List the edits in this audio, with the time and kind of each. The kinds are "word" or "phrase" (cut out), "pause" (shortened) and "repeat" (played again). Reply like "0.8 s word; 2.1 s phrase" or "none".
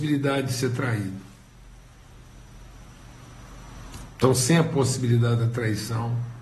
none

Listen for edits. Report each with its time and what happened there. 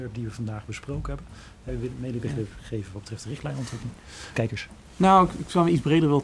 1.7 s phrase; 4.3 s phrase

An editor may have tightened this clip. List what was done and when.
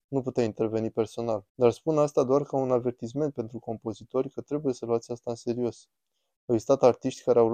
1.5 s pause

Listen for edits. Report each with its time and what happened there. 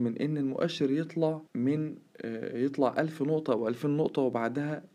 1.5 s pause

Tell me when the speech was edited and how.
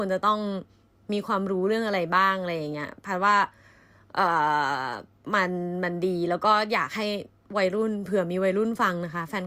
none

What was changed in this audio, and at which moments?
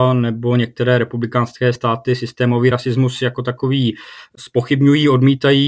none

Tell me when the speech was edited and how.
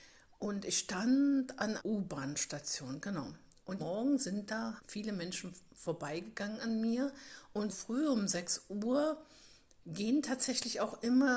1.8 s word; 3.8 s word; 4.8 s word; 7.7 s word

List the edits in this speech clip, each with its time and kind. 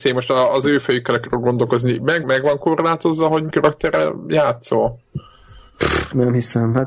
2.2 s word; 3.5 s word

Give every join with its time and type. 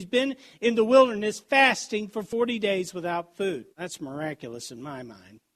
3.7 s pause

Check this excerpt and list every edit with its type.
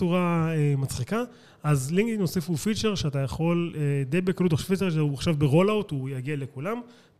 none

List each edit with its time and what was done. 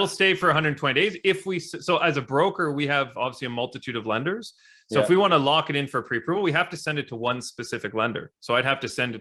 none

